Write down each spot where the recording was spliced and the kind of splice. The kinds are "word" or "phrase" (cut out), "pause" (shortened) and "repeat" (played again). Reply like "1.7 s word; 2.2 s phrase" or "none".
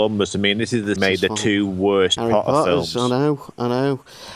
1.0 s phrase; 2.2 s word

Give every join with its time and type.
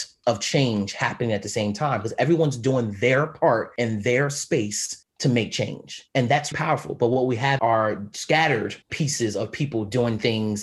6.1 s pause; 7.6 s word; 8.8 s pause

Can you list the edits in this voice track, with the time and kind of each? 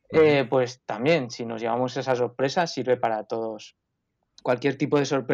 none

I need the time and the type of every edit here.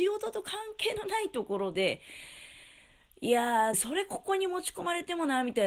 3.7 s phrase

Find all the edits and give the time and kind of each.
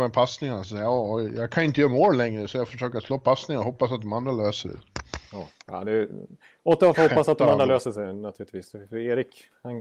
2.7 s word

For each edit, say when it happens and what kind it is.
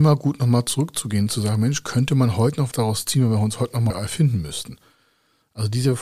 2.7 s word; 3.9 s word

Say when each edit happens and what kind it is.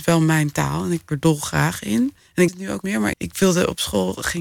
1.1 s word; 2.5 s word; 2.8 s word; 3.1 s word

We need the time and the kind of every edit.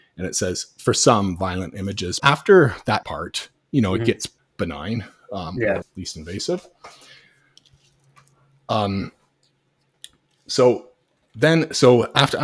2.2 s word; 3.0 s word; 4.4 s word; 5.8 s word

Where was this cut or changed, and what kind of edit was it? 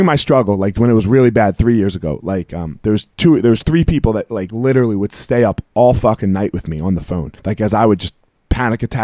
3.1 s pause; 7.4 s pause

